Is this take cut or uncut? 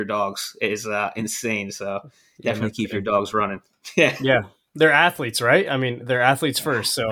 uncut